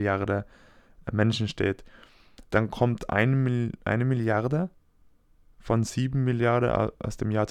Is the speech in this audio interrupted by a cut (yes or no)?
yes